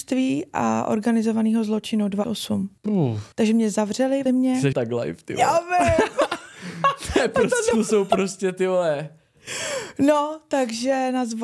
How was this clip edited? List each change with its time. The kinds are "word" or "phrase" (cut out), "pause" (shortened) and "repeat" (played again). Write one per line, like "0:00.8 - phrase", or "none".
0:02.2 - word
0:02.8 - pause
0:03.3 - pause
0:04.3 - word
0:04.7 - word
0:07.7 - word